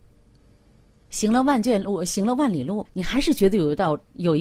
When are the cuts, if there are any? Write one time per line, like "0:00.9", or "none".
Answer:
0:02.8